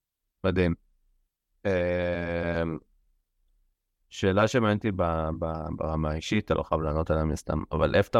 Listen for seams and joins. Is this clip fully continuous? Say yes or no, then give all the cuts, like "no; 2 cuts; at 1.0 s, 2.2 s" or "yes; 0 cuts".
yes; 0 cuts